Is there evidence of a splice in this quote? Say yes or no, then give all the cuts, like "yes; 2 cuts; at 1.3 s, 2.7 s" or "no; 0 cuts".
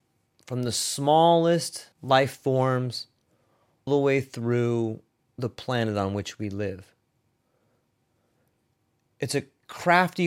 yes; 3 cuts; at 1.9 s, 3.9 s, 5.2 s